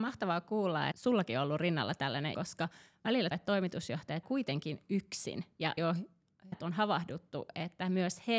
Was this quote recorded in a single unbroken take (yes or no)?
no